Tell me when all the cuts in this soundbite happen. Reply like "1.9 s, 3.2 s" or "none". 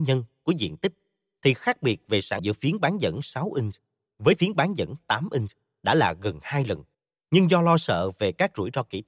2.4 s, 6.9 s